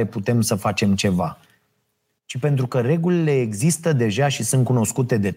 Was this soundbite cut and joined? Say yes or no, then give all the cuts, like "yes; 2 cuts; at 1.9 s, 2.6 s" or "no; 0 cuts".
no; 0 cuts